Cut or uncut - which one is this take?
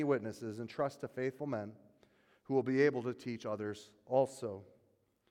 uncut